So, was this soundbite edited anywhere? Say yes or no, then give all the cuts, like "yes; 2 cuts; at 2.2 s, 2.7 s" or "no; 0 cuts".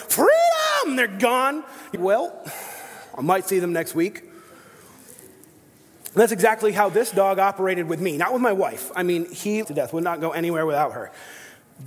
yes; 2 cuts; at 2.0 s, 9.6 s